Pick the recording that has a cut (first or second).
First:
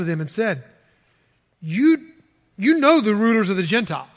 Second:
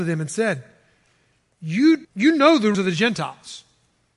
second